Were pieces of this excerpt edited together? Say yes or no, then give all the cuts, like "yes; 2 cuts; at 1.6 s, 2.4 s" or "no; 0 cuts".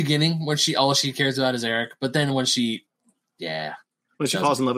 no; 0 cuts